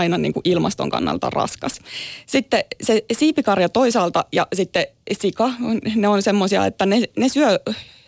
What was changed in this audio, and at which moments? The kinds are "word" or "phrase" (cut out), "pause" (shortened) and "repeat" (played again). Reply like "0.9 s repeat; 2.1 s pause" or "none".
none